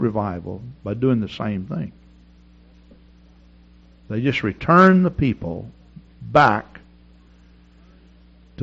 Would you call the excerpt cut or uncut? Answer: uncut